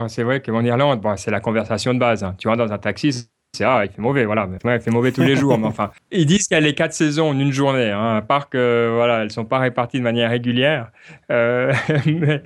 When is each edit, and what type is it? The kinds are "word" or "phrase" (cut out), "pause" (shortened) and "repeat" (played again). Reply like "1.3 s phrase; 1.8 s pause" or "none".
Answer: 4.6 s word